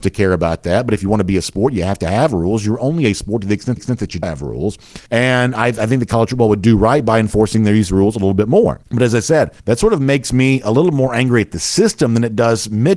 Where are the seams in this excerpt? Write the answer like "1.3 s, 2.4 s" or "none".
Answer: 3.8 s, 4.2 s, 5.1 s, 8.8 s, 9.6 s